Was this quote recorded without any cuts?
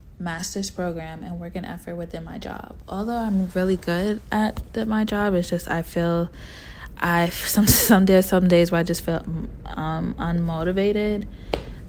yes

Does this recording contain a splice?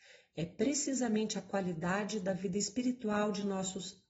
no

